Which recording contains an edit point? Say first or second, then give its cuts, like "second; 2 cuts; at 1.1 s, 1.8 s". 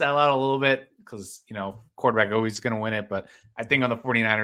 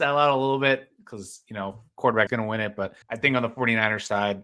second; 2 cuts; at 2.3 s, 3.0 s